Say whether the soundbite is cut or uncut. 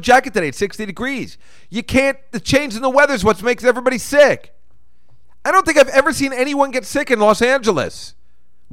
uncut